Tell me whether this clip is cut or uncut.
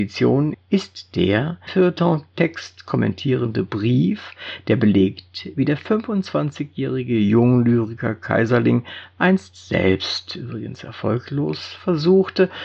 cut